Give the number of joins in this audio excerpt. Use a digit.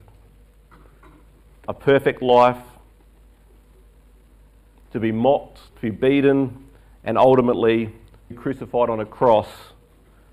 2